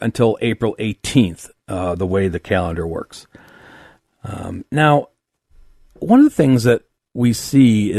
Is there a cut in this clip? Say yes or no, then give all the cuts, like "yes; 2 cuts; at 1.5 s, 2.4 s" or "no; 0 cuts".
no; 0 cuts